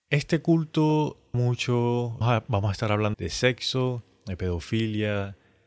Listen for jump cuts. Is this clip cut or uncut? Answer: cut